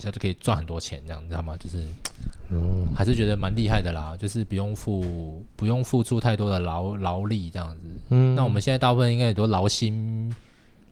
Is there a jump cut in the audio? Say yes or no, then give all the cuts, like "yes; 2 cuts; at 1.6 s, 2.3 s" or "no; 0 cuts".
no; 0 cuts